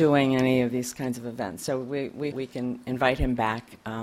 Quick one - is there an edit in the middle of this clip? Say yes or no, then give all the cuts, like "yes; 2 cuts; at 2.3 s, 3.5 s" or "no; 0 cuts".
yes; 1 cut; at 2.3 s